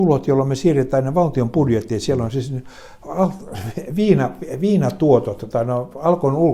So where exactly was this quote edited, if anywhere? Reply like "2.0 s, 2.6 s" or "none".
5.5 s

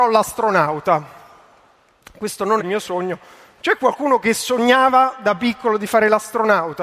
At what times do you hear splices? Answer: 2.6 s

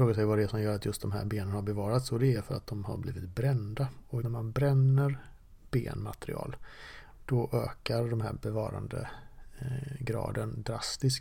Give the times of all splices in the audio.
4.2 s

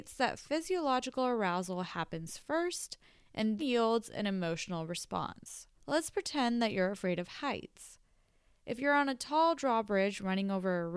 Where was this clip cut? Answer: 3.6 s, 5.8 s

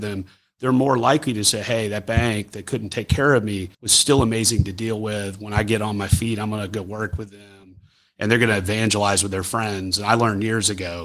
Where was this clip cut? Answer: 3.7 s

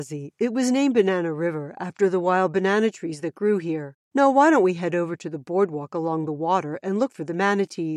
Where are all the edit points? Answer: 4.0 s

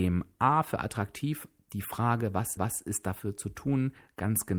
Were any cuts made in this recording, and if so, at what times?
2.6 s

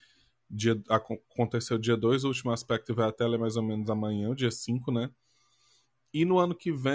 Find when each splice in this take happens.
none

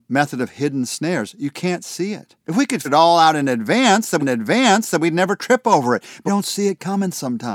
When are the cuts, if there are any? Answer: 2.4 s, 2.8 s, 4.2 s, 6.3 s

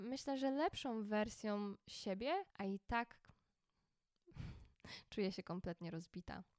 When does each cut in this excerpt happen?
2.5 s

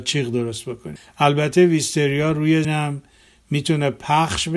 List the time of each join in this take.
2.6 s

